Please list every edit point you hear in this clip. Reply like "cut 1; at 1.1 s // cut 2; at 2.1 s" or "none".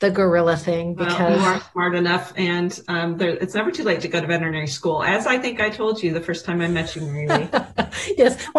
none